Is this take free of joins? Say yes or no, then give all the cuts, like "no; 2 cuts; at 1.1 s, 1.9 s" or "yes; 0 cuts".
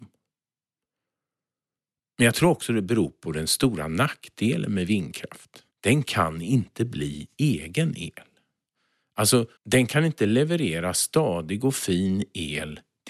no; 2 cuts; at 5.7 s, 9.6 s